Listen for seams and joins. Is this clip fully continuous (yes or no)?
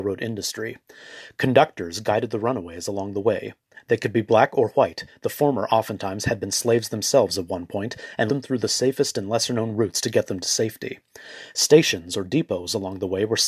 no